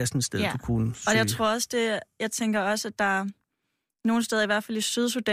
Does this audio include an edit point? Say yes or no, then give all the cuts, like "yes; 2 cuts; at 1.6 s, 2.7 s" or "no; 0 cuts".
no; 0 cuts